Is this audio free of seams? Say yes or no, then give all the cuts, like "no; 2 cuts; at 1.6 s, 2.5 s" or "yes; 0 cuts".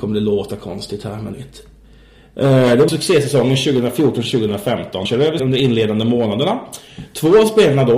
no; 4 cuts; at 1.3 s, 2.9 s, 5.1 s, 5.4 s